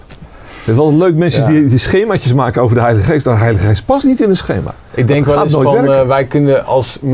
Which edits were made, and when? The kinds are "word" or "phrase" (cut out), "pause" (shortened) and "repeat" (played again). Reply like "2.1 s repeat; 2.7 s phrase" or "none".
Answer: none